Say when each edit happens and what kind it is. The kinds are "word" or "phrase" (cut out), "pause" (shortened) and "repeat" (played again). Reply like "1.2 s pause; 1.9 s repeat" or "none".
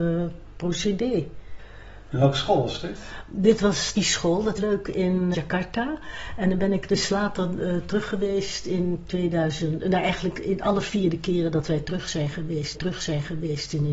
4.0 s phrase; 4.6 s phrase; 5.3 s word; 12.7 s repeat